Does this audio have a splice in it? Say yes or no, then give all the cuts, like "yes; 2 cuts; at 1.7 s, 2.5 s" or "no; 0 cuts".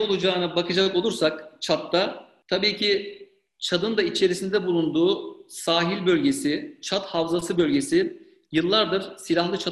no; 0 cuts